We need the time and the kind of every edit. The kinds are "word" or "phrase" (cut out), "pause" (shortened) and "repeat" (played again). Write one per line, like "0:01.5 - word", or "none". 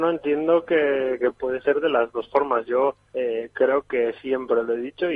0:01.3 - word
0:03.1 - pause